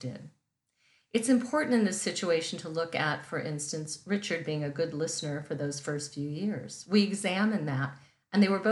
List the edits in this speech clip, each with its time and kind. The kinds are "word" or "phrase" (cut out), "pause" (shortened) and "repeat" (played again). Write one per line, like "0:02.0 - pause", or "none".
none